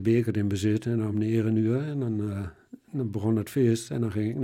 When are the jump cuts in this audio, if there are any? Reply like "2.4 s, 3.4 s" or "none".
none